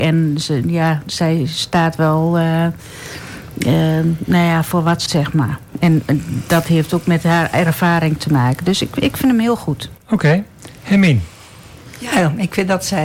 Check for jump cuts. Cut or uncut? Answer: cut